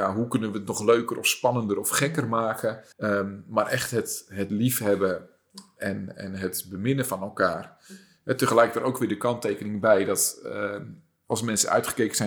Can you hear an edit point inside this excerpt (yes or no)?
yes